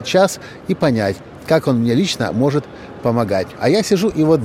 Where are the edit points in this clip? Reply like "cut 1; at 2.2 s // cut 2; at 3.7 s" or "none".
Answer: none